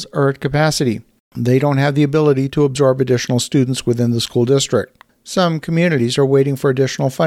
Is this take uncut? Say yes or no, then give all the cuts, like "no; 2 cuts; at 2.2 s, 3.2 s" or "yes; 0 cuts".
yes; 0 cuts